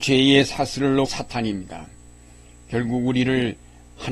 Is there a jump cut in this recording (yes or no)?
yes